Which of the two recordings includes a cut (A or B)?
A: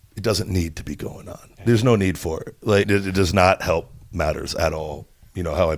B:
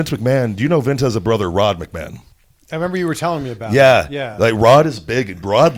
A